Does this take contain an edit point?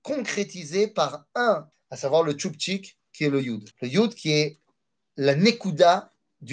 yes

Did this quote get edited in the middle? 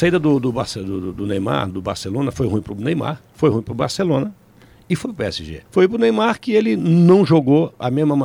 yes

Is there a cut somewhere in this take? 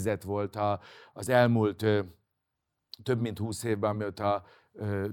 no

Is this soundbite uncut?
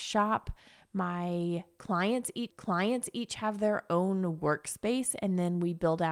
no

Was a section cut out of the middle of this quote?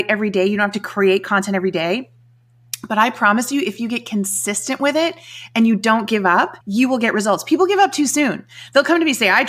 yes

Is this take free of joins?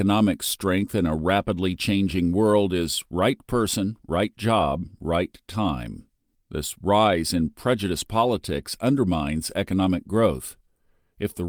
yes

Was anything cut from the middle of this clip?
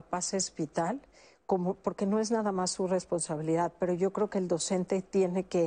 no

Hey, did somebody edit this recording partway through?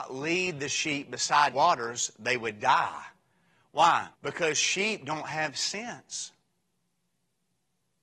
yes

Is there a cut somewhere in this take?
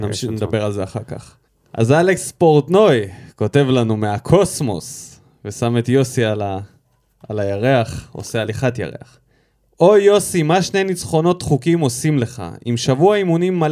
no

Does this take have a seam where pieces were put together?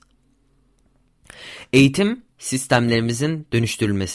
no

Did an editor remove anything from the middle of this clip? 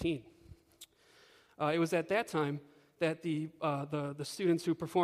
no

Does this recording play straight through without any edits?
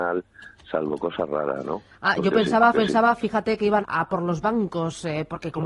no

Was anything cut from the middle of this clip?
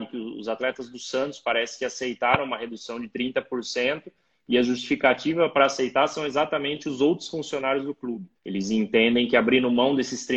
yes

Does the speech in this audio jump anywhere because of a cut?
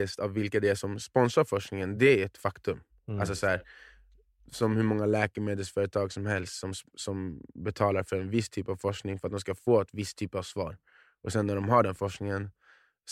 no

